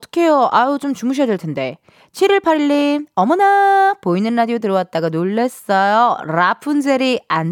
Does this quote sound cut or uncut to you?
uncut